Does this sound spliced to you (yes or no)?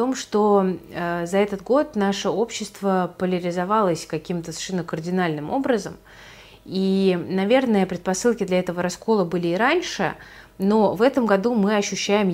no